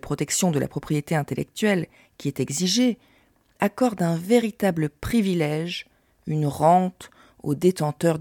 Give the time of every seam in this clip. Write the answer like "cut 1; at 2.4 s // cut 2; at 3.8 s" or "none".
none